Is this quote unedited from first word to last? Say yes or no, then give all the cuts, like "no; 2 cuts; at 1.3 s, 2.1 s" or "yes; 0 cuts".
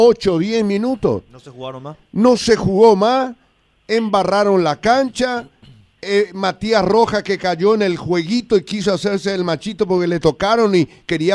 yes; 0 cuts